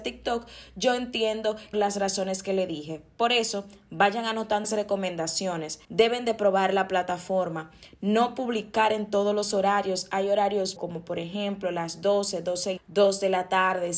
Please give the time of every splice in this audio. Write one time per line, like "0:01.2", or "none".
0:01.7
0:04.6
0:05.8
0:10.8
0:12.8